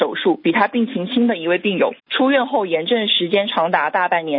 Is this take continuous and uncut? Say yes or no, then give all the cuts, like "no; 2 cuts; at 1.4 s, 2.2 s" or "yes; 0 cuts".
no; 1 cut; at 2.0 s